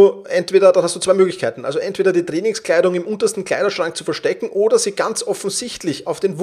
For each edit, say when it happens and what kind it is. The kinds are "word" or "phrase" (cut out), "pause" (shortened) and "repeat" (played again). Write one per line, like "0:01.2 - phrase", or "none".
none